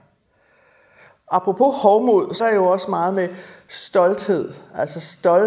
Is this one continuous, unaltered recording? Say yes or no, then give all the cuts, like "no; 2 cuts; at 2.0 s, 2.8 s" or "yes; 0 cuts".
no; 1 cut; at 2.4 s